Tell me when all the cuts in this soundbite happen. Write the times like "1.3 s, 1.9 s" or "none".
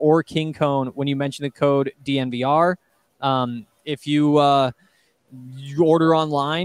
none